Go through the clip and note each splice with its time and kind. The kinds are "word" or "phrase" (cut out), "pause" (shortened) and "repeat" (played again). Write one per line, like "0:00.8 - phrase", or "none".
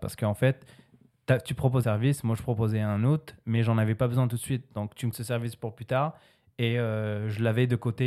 0:01.8 - word
0:05.1 - phrase

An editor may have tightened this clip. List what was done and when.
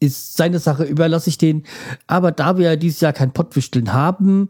none

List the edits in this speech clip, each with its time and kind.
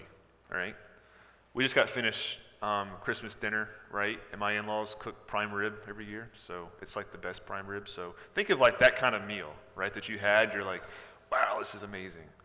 none

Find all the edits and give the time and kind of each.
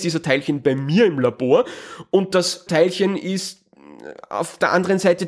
0:02.7 - word

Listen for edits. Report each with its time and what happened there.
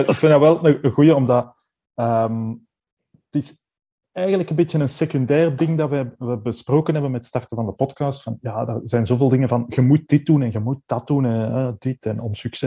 none

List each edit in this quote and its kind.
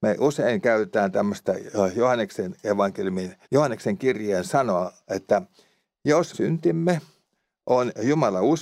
0:03.4 - pause
0:06.3 - phrase

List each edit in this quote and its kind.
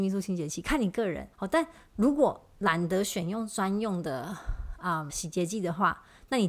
0:01.3 - pause
0:05.1 - word

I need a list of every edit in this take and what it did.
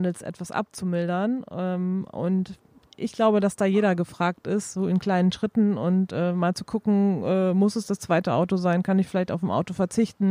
none

